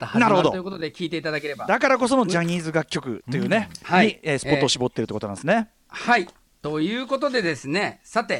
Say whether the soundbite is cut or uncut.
uncut